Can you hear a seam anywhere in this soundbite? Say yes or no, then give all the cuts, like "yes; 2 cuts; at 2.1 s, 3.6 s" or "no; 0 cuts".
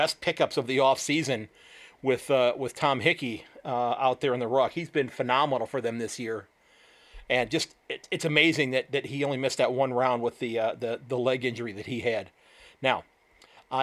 no; 0 cuts